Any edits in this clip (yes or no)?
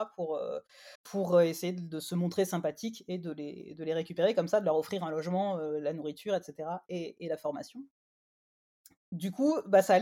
yes